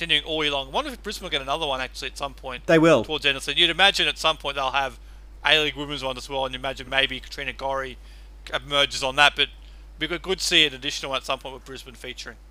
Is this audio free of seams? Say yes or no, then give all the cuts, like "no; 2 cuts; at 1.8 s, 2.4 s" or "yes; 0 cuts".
yes; 0 cuts